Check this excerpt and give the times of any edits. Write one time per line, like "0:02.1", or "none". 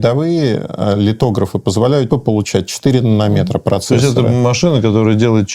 0:02.1